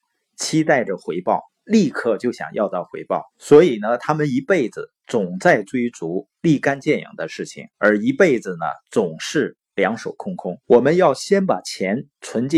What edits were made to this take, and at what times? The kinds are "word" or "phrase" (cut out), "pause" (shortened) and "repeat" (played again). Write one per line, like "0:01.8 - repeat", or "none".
0:01.5 - pause
0:03.3 - pause
0:07.7 - pause
0:10.6 - pause